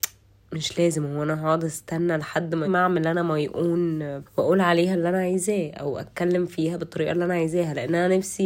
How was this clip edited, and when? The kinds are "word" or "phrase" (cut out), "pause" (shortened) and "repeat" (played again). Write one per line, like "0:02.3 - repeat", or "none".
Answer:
0:02.6 - word
0:04.3 - word